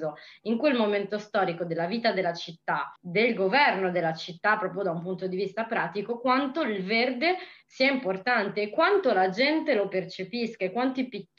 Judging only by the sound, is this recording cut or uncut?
cut